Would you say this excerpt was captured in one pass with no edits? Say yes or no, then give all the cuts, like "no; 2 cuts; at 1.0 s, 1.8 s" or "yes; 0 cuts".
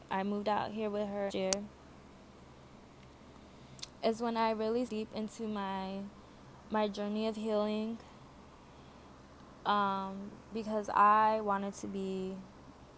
no; 2 cuts; at 1.3 s, 4.9 s